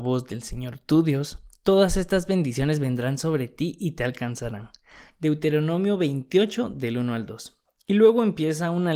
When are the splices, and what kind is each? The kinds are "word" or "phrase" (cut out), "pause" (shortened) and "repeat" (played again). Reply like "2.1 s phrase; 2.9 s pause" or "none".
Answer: none